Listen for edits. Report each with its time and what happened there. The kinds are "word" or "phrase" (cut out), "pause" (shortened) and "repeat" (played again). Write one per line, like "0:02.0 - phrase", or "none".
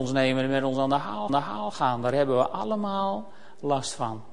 0:01.3 - repeat